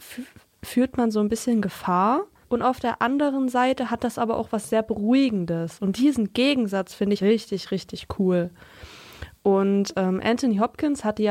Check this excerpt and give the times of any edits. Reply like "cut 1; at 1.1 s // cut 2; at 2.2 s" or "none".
cut 1; at 2.4 s // cut 2; at 7.2 s